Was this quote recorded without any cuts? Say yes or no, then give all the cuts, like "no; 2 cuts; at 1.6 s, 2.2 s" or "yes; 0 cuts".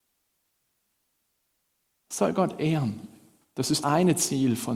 no; 1 cut; at 3.8 s